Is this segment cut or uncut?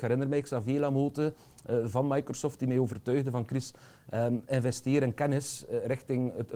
uncut